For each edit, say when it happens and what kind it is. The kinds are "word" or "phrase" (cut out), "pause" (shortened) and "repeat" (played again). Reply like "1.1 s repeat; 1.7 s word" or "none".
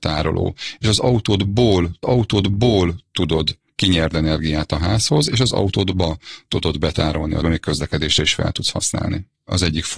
2.0 s repeat; 4.1 s word; 7.4 s phrase